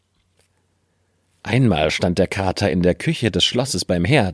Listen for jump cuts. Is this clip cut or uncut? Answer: uncut